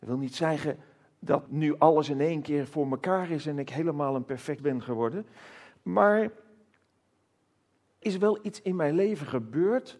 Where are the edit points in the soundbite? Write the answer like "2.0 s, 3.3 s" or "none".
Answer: 1.5 s, 4.6 s, 8.0 s